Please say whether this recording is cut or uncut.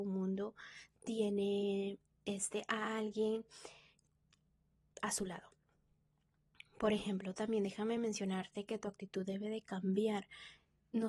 uncut